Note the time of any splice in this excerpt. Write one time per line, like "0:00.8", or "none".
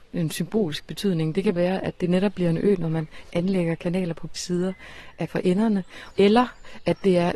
0:01.6
0:04.4
0:05.3

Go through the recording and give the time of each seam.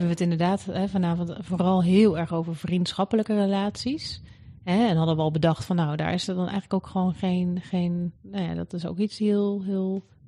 0:08.2

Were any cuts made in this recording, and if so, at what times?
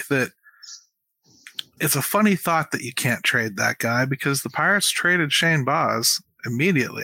0:01.8

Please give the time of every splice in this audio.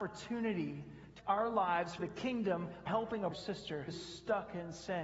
0:01.2
0:02.0
0:02.9
0:03.3
0:03.9

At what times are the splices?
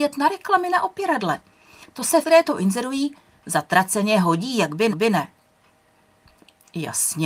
0:02.2
0:04.9

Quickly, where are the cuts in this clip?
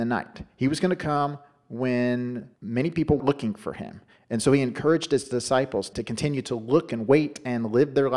0:02.6
0:03.2
0:05.9

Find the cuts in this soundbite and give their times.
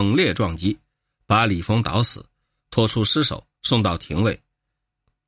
0:03.5

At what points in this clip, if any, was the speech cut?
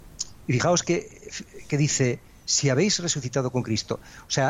none

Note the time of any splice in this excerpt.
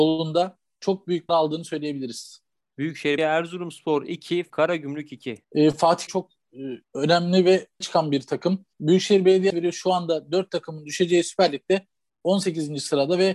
0:01.3
0:03.2
0:04.5
0:05.4
0:06.1
0:06.8
0:07.8
0:08.7
0:09.5

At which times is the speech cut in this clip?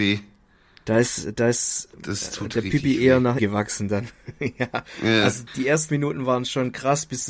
0:03.4
0:05.5
0:05.9

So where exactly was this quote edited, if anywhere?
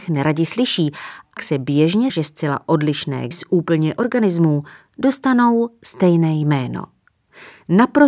0:01.4
0:02.1
0:03.3
0:04.0

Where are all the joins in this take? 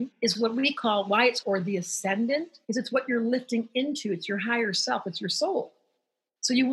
0:01.4
0:02.6

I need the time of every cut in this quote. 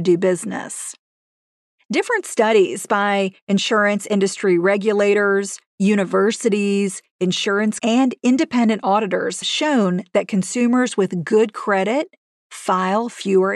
0:07.8
0:09.4

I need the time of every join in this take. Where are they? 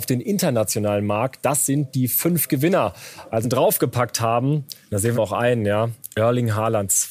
0:03.4
0:04.8
0:05.1

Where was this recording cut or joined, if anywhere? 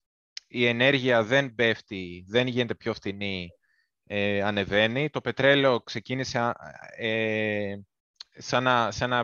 none

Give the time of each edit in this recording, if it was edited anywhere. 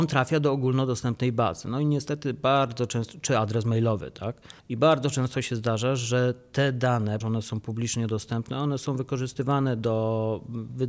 0:04.6
0:07.2

